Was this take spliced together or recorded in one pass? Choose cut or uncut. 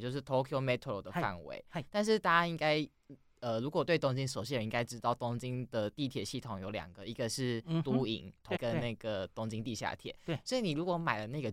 cut